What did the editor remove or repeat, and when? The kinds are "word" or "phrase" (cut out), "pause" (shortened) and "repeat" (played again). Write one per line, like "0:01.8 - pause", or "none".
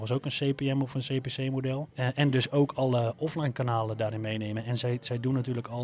0:01.9 - pause